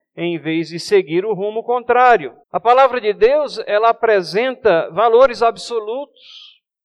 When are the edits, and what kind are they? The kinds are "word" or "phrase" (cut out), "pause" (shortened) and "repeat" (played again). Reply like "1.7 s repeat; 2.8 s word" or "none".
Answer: 2.4 s pause